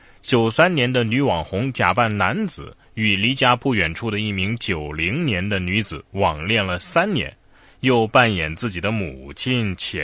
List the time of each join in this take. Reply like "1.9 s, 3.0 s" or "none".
none